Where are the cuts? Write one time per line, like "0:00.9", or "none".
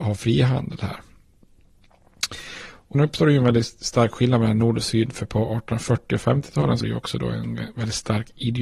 0:02.9
0:06.8

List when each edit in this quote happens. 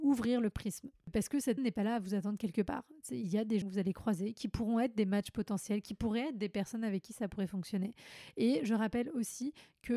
0:01.6
0:03.6

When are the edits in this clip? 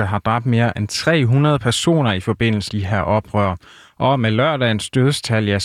0:02.7

